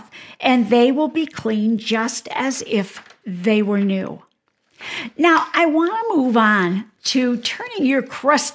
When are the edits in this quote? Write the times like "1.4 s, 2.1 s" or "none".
none